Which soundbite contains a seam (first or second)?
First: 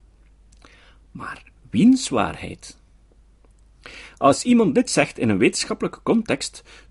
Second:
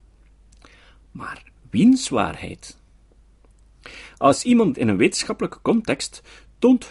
second